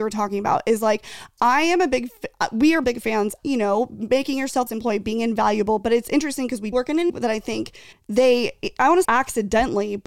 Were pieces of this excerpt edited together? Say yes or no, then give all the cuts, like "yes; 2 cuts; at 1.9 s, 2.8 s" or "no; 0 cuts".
yes; 8 cuts; at 2.2 s, 2.8 s, 3.4 s, 4.7 s, 6.7 s, 7.1 s, 7.9 s, 9.0 s